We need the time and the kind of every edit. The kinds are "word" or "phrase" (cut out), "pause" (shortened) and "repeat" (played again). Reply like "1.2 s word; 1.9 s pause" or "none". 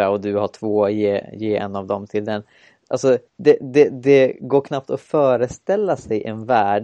3.3 s pause